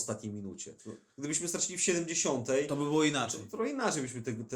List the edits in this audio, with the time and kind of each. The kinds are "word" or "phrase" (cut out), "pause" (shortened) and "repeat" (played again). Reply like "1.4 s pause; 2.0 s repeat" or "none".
none